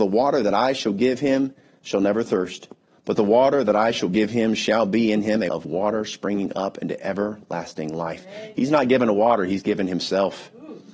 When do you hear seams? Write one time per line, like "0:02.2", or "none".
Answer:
0:05.5